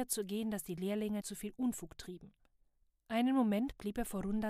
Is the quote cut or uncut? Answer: cut